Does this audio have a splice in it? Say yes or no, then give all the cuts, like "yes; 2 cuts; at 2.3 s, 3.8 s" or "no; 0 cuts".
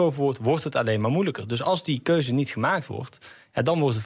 no; 0 cuts